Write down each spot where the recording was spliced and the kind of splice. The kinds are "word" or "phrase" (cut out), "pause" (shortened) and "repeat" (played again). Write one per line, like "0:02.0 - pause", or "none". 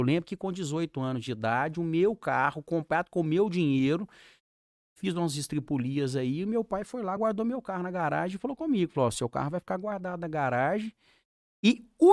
none